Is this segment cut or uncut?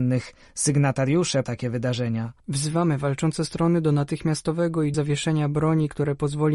cut